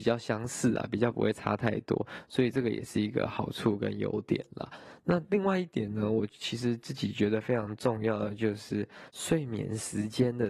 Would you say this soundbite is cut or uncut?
cut